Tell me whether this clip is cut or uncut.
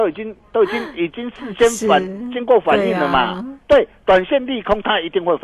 cut